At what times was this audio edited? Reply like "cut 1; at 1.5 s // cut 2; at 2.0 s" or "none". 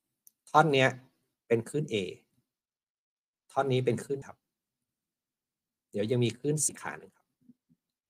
cut 1; at 4.2 s // cut 2; at 6.7 s

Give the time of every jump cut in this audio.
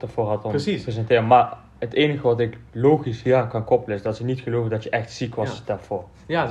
cut 1; at 2.7 s

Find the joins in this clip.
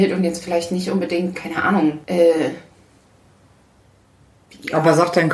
cut 1; at 1.3 s // cut 2; at 2.0 s

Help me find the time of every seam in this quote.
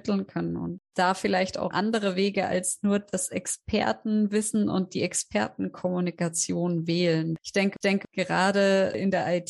cut 1; at 1.7 s // cut 2; at 7.4 s // cut 3; at 7.8 s

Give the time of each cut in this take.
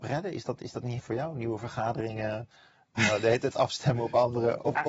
cut 1; at 1.0 s

